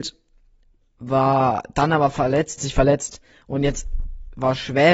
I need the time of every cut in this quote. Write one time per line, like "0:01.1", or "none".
0:02.6